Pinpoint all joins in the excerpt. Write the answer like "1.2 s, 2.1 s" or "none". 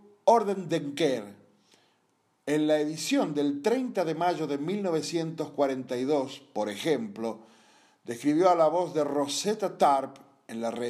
none